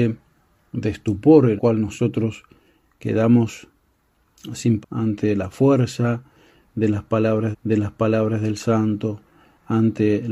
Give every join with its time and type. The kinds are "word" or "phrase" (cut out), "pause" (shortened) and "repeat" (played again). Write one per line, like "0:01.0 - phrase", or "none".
0:01.6 - word
0:04.8 - phrase
0:07.5 - repeat